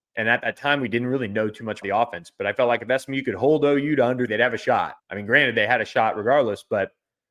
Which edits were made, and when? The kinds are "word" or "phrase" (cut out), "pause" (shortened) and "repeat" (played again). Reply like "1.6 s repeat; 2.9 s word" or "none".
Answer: 1.8 s word; 4.3 s word; 5.0 s pause